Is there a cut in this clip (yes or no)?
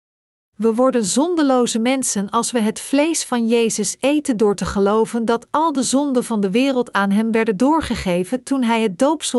no